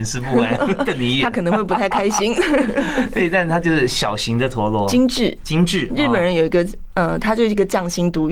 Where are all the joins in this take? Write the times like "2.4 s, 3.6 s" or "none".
none